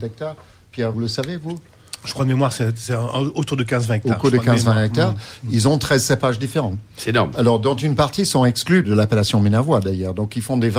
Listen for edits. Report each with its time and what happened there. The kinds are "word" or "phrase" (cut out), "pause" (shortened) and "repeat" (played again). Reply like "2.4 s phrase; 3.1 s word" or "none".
0.9 s word; 8.8 s word